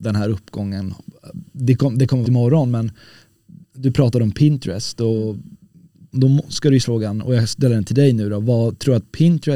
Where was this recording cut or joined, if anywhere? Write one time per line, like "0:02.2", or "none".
0:02.2
0:06.1
0:06.8